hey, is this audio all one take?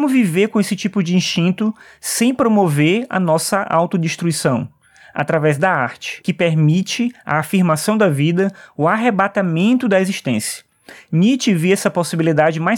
yes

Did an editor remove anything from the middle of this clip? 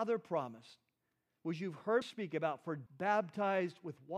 yes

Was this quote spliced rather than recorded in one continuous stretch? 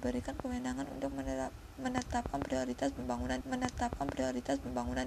yes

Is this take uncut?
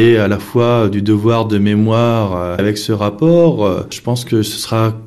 no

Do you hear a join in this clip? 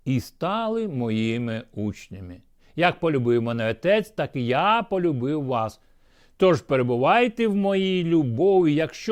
no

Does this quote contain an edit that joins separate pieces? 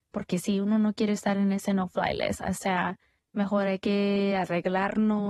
yes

